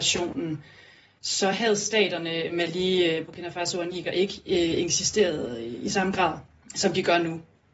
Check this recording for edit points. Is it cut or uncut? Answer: uncut